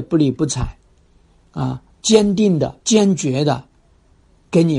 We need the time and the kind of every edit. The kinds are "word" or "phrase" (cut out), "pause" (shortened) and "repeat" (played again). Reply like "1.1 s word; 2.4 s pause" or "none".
1.9 s pause; 2.8 s pause